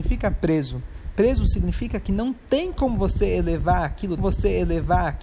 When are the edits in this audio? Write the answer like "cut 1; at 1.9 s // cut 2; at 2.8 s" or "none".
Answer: cut 1; at 4.2 s